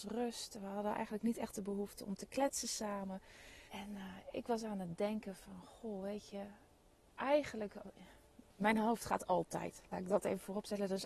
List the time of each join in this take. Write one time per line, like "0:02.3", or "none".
0:03.7
0:08.5